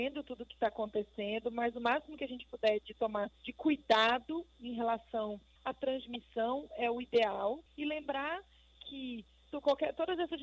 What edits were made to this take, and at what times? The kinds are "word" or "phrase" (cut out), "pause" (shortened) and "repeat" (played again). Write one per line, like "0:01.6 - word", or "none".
0:03.4 - pause
0:05.6 - pause
0:07.7 - pause